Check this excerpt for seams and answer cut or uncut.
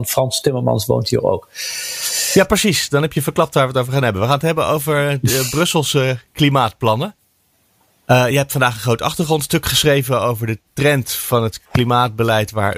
uncut